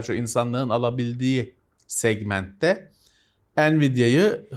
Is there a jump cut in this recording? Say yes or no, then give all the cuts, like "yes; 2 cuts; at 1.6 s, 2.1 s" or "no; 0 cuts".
no; 0 cuts